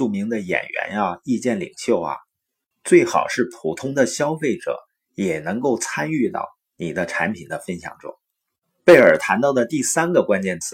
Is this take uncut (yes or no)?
yes